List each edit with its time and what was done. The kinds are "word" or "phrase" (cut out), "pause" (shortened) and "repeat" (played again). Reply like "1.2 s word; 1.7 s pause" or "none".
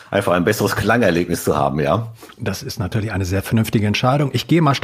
none